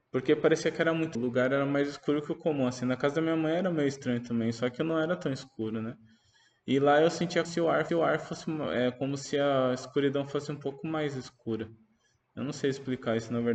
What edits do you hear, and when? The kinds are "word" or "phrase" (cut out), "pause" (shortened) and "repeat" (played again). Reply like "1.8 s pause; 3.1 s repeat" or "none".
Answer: 1.1 s phrase; 7.4 s word; 7.9 s repeat